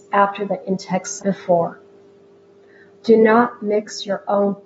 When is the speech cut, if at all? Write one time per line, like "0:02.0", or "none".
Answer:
0:01.2